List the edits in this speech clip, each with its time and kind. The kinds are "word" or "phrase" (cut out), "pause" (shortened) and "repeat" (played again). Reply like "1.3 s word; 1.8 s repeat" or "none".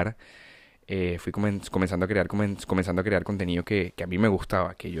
2.3 s repeat; 3.9 s word